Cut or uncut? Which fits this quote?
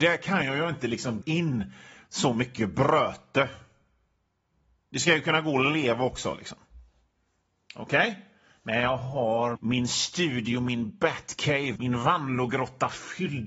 cut